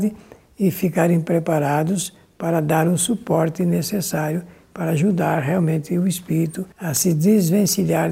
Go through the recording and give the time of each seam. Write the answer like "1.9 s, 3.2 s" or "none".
6.7 s